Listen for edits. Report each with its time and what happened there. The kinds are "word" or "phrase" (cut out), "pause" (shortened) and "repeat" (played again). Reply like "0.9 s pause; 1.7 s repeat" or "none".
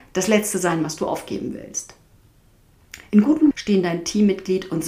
3.5 s word